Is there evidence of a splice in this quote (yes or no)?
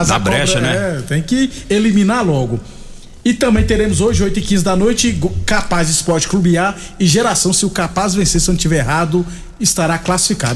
no